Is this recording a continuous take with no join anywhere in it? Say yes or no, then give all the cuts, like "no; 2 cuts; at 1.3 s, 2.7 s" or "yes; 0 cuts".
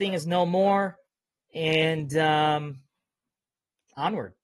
yes; 0 cuts